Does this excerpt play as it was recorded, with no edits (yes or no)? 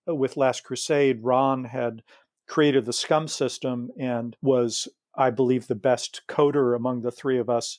yes